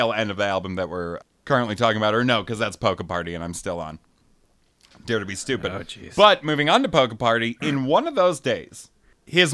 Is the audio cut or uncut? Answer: uncut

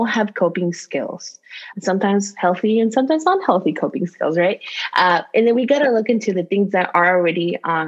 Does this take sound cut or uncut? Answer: cut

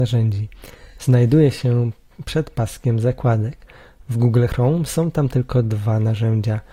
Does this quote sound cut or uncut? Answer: uncut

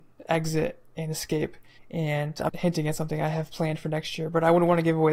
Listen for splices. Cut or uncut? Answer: cut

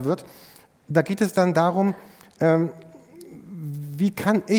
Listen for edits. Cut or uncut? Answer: uncut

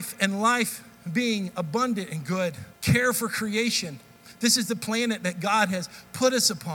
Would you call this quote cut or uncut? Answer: cut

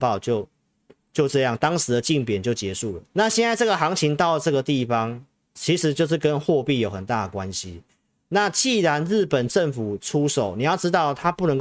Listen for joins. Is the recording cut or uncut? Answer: cut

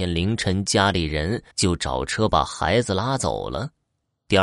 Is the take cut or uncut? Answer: cut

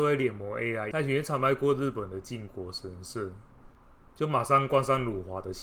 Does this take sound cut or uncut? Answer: cut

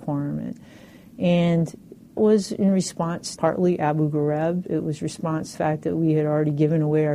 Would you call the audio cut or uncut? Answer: cut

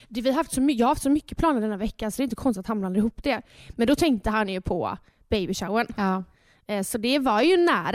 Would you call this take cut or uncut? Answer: uncut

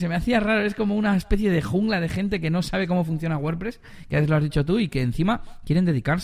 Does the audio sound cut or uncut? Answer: uncut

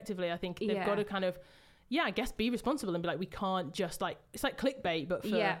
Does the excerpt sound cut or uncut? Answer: uncut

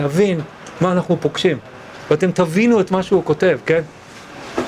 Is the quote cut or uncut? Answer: uncut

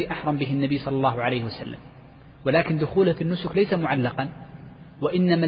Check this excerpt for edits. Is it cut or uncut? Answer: uncut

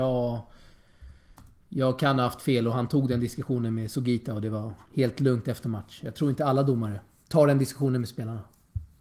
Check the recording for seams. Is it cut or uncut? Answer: uncut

